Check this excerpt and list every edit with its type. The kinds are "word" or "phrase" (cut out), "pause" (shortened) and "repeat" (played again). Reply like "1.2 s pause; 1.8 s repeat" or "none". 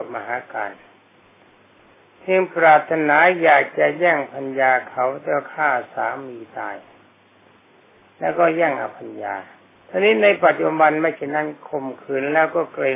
9.7 s pause